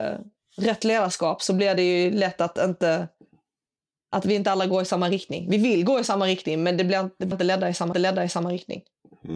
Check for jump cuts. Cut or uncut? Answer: cut